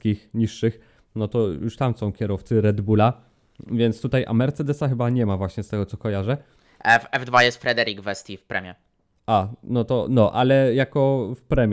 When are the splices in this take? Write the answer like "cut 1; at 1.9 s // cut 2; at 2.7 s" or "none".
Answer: none